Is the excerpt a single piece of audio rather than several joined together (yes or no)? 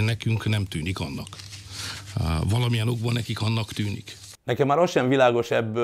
yes